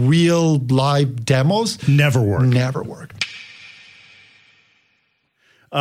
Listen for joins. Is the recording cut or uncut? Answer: uncut